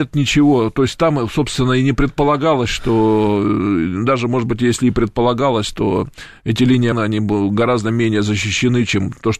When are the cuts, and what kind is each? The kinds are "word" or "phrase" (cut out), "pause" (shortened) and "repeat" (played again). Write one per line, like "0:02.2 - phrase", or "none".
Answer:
0:06.9 - word